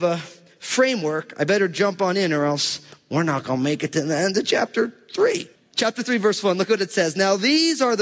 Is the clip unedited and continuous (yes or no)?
yes